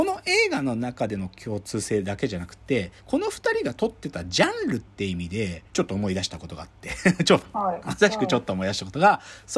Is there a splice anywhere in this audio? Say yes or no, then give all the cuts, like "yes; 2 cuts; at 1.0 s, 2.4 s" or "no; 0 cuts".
yes; 2 cuts; at 3.0 s, 5.7 s